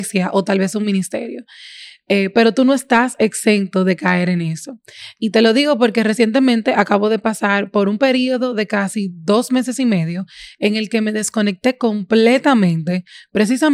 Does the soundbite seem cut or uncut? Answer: uncut